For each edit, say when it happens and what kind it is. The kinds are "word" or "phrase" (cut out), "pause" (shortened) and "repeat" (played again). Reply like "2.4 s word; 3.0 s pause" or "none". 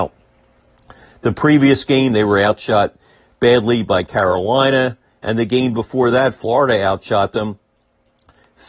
none